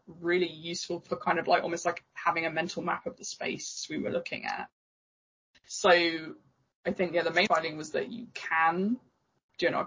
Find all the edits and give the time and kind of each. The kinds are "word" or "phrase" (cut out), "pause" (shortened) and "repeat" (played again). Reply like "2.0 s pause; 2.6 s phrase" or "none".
7.5 s word